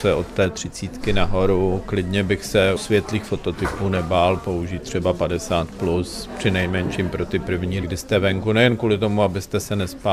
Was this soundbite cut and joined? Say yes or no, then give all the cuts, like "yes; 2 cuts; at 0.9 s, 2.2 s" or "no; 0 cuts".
yes; 2 cuts; at 2.8 s, 7.8 s